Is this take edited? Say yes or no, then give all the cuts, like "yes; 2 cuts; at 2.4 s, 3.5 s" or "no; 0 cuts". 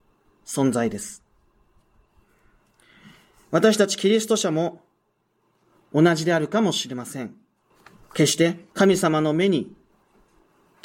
yes; 2 cuts; at 7.7 s, 8.7 s